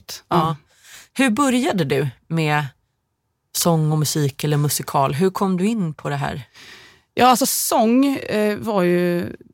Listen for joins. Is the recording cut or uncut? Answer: uncut